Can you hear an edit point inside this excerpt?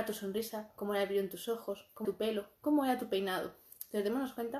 yes; 1 cut; at 2.0 s

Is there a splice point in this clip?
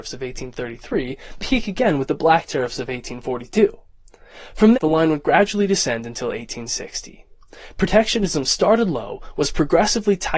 yes; 2 cuts; at 1.4 s, 4.7 s

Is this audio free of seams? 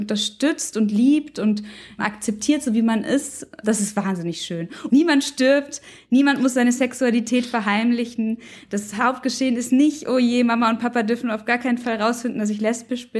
yes; 0 cuts

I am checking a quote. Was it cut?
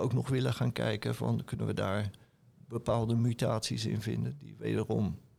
no; 0 cuts

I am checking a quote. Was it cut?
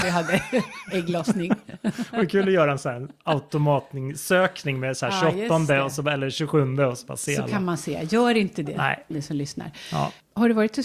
yes; 1 cut; at 9.1 s

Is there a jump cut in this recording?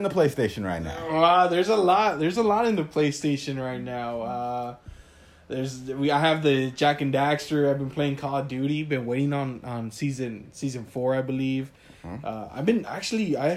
no; 0 cuts

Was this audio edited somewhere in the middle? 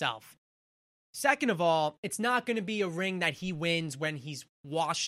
no; 0 cuts

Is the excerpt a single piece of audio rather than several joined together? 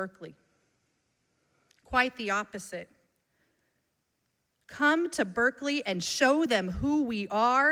yes; 0 cuts

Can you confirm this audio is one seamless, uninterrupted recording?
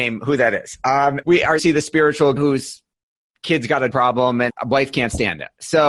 no; 5 cuts; at 1.2 s, 1.6 s, 2.4 s, 3.9 s, 4.5 s

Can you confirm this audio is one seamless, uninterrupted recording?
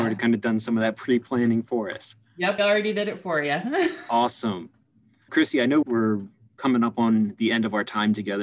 no; 3 cuts; at 2.6 s, 5.3 s, 5.8 s

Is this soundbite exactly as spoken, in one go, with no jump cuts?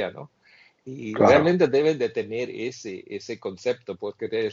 yes; 0 cuts

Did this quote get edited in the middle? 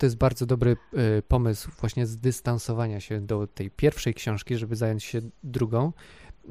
no; 0 cuts

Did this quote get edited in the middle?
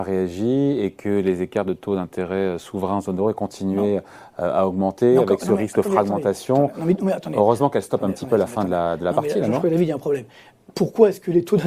no; 0 cuts

